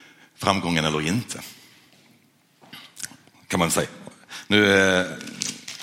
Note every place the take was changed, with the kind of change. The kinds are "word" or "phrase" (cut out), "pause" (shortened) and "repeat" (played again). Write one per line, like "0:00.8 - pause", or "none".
none